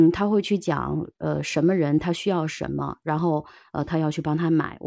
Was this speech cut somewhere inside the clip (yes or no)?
no